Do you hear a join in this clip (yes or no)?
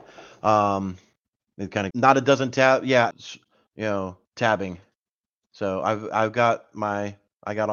yes